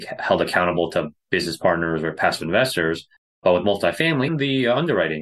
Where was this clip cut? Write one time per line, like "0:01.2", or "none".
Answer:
0:03.2
0:04.3